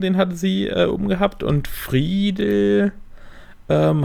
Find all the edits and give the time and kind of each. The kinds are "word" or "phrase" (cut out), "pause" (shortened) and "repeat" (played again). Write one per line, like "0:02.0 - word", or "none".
none